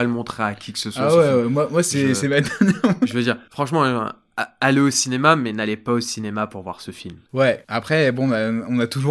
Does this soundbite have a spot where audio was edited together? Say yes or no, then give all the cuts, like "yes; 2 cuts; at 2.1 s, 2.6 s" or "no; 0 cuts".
no; 0 cuts